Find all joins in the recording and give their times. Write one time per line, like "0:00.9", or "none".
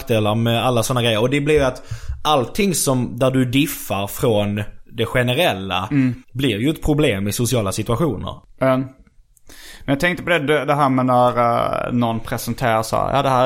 0:06.2